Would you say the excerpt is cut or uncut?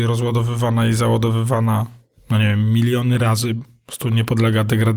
uncut